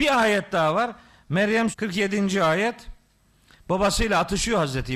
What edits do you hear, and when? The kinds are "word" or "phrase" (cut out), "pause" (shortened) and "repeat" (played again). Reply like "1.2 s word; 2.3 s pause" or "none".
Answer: 1.7 s word